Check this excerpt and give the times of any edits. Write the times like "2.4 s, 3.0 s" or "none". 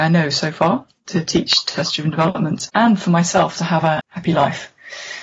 2.7 s, 4.0 s